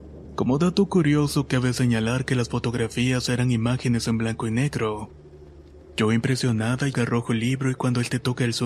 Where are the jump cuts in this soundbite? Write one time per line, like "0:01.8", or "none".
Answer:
0:06.9